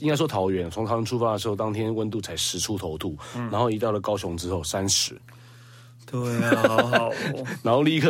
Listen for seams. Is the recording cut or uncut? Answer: uncut